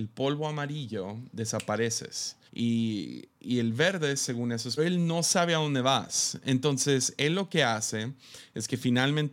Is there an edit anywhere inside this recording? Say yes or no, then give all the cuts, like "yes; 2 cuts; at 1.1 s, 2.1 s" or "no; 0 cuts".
yes; 2 cuts; at 2.5 s, 4.8 s